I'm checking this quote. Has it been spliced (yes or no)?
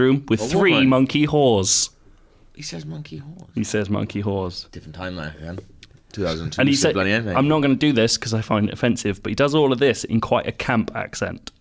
no